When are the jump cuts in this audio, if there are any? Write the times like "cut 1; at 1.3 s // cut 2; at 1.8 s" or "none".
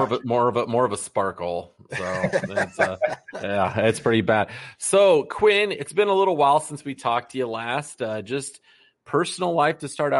none